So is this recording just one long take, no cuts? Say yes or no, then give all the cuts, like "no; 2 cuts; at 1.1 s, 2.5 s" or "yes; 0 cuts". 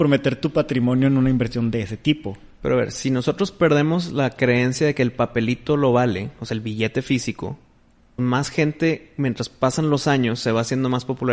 no; 1 cut; at 8.2 s